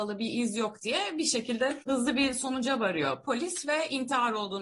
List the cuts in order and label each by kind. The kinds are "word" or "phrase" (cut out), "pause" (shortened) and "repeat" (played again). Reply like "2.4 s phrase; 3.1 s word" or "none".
1.8 s pause